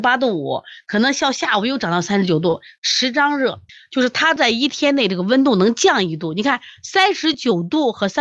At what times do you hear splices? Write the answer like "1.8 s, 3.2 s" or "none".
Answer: 3.7 s